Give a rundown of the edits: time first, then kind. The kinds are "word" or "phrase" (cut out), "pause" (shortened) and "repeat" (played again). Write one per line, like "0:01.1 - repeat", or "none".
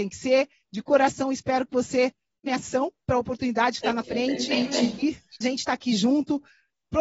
0:02.5 - word
0:04.0 - word
0:05.4 - word